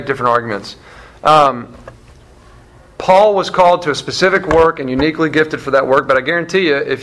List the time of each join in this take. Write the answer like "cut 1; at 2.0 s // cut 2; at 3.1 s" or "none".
none